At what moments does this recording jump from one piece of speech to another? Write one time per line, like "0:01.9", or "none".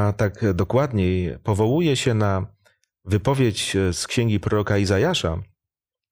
none